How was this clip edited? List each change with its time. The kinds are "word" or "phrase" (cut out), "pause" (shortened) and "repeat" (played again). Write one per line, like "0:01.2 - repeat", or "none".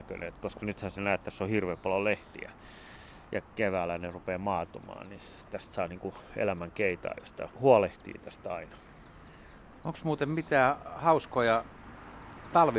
0:07.5 - word

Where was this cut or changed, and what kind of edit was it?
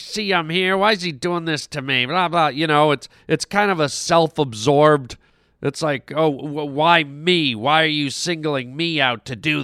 0:05.3 - pause

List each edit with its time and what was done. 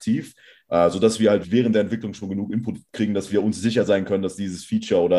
0:01.4 - word

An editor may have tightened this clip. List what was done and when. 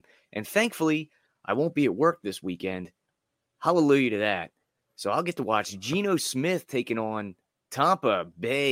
none

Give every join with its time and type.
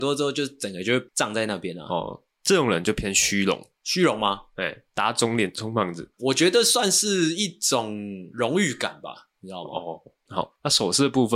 0:04.9 - pause
0:06.1 - pause
0:10.3 - word

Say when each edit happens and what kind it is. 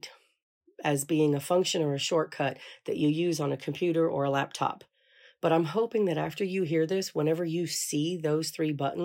none

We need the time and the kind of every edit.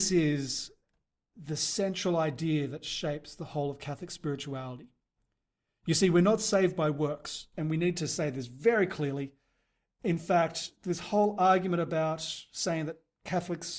none

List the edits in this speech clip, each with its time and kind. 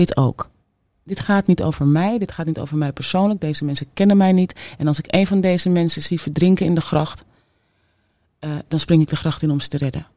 none

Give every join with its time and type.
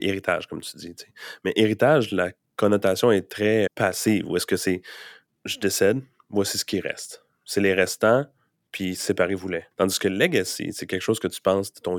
0:03.7 - word
0:05.3 - pause
0:09.7 - pause

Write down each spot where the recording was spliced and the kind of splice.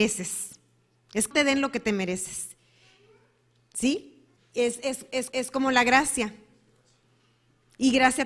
0:01.3 - word
0:04.4 - pause
0:05.3 - repeat

